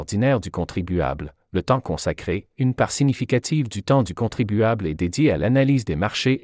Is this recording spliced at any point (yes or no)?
no